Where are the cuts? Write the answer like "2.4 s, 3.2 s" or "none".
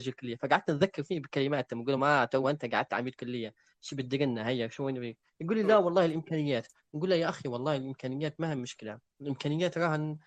none

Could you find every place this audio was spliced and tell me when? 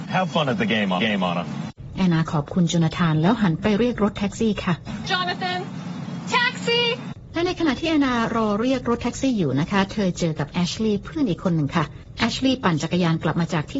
1.0 s, 5.1 s

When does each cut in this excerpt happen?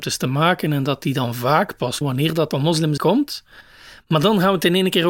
2.0 s, 2.5 s, 3.0 s

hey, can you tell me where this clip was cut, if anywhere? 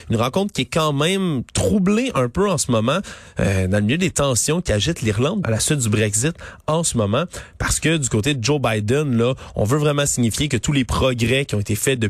5.4 s

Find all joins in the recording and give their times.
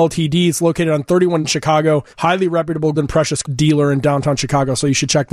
1.4 s, 2.1 s, 2.9 s, 3.4 s

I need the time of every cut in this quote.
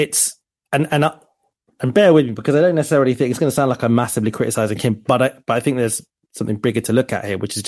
none

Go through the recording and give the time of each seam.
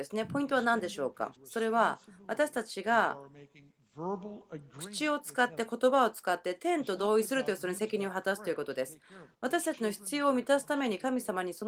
1.4 s, 9.3 s

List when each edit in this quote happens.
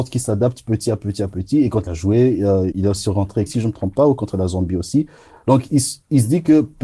1.9 s, 2.7 s, 3.5 s

